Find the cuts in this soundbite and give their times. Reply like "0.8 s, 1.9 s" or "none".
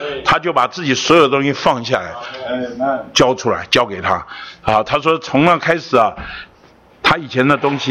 none